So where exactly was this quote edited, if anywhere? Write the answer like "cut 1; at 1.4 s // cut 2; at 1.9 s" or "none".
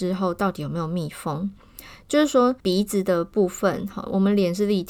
cut 1; at 2.6 s